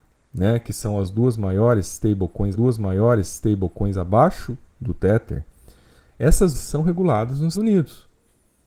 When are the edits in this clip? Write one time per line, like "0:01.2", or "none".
0:02.5
0:06.5
0:07.5